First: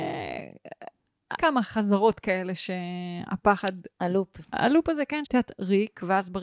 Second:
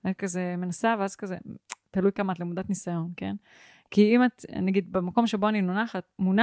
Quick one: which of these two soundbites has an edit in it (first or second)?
first